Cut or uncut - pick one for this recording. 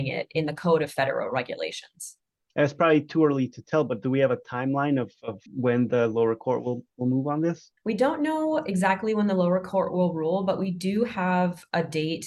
cut